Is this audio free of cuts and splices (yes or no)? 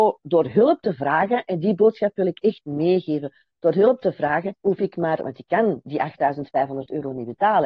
no